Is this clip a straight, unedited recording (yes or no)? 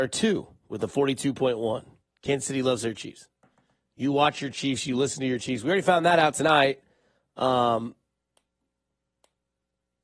yes